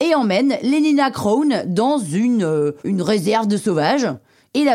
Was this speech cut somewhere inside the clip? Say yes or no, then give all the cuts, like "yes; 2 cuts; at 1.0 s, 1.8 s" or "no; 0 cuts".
yes; 1 cut; at 2.8 s